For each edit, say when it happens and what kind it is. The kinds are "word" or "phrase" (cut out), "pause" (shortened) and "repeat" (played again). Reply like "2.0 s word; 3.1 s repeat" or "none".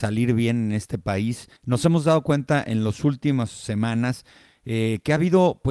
1.6 s pause

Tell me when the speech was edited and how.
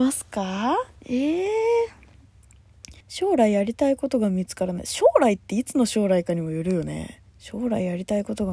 0.9 s pause; 3.0 s pause; 7.3 s pause

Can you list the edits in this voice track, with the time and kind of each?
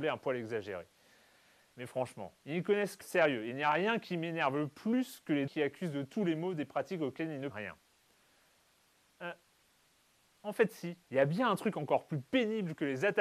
2.4 s pause; 3.0 s word; 5.5 s word; 7.5 s word; 11.0 s pause

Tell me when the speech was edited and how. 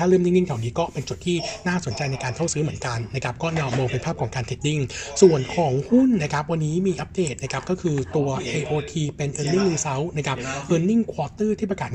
none

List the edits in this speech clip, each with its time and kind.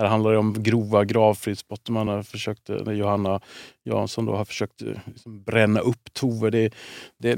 none

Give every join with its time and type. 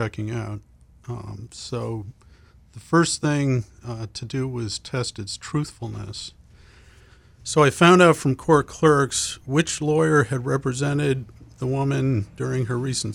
none

